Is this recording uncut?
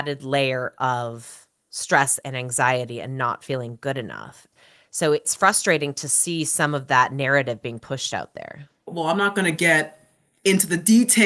yes; 0 cuts

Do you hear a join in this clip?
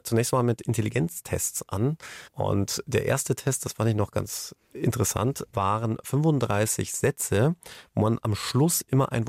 yes; 1 cut; at 2.3 s

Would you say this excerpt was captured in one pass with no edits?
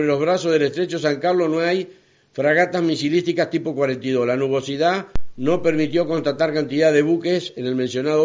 yes; 0 cuts

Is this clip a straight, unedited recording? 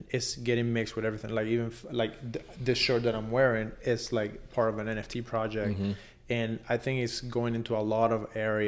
yes; 0 cuts

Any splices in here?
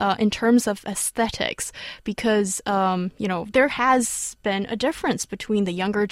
yes; 1 cut; at 3.5 s

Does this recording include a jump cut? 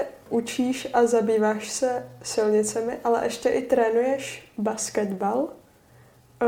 no; 0 cuts

